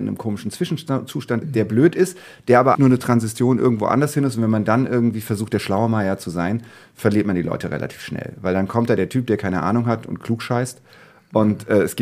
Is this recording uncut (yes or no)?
no